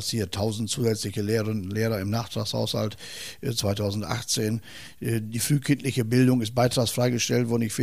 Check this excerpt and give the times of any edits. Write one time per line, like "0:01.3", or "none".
none